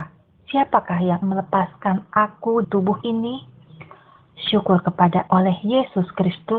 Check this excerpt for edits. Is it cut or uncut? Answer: cut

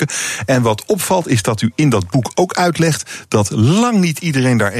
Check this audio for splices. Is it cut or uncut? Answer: uncut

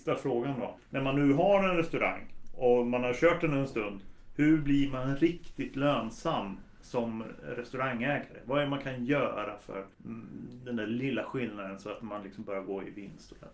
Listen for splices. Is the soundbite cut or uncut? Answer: cut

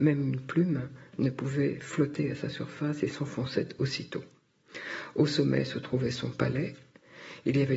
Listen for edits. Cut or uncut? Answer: uncut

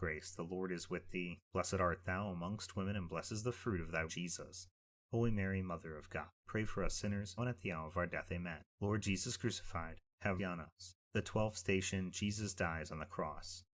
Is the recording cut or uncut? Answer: cut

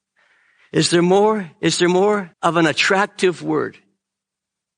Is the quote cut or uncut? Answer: cut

